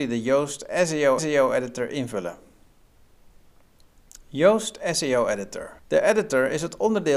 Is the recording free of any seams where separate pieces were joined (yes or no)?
no